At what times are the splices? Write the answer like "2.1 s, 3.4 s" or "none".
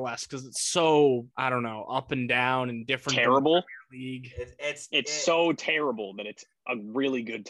1.3 s